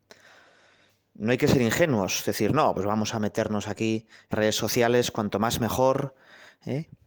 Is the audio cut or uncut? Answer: cut